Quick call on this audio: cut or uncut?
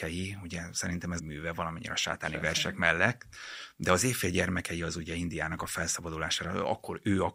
cut